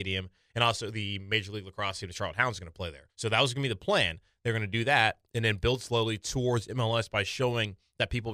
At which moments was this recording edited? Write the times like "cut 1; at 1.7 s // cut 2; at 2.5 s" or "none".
cut 1; at 3.1 s